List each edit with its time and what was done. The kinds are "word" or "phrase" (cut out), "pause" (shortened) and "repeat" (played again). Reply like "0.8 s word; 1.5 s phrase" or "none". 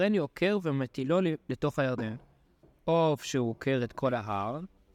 none